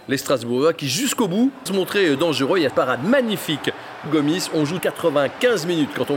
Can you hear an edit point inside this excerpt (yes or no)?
yes